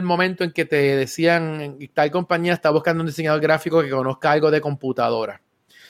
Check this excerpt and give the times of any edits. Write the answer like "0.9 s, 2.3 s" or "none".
none